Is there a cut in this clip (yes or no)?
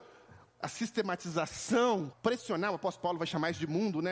yes